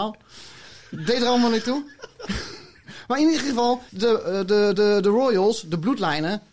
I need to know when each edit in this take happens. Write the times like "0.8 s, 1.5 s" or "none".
3.9 s, 4.7 s